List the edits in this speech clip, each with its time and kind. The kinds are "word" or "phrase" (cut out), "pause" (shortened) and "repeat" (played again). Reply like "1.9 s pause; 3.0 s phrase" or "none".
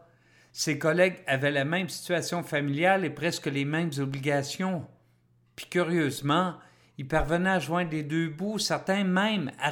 none

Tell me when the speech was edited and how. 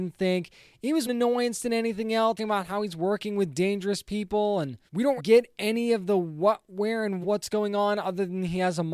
1.1 s phrase; 2.4 s phrase; 4.9 s pause; 5.2 s word; 7.2 s phrase

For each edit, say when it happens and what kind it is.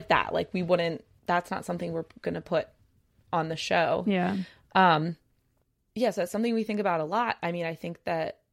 none

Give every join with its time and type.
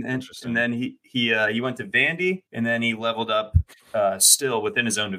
2.5 s pause

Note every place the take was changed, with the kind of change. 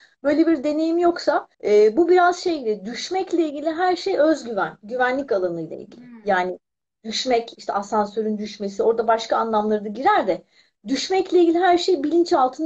1.5 s pause

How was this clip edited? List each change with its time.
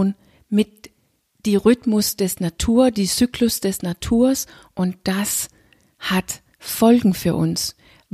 none

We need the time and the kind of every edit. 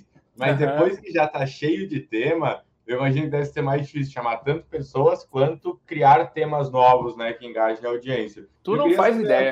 8.6 s pause

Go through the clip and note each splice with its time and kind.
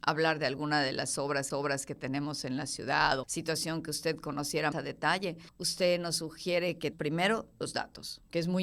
1.5 s repeat; 3.2 s word; 4.7 s word; 5.5 s pause; 6.9 s word; 7.6 s word

